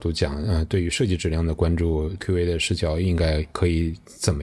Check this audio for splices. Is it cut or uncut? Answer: cut